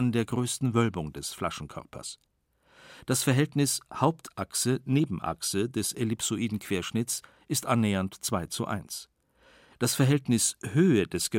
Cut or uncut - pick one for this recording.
uncut